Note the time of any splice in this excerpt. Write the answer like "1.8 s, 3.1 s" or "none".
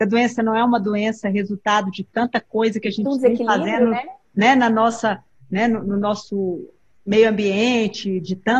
none